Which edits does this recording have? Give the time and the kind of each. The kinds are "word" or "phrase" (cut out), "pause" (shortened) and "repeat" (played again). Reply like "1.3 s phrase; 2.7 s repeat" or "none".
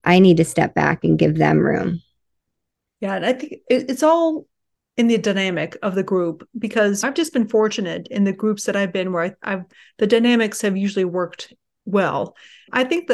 none